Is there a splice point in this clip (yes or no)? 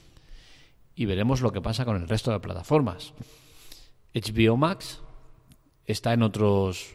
no